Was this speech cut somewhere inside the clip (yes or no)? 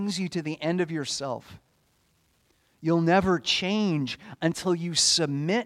no